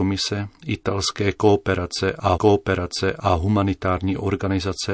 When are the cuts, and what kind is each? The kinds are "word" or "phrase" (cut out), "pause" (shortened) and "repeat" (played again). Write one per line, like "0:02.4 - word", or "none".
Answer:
0:02.3 - repeat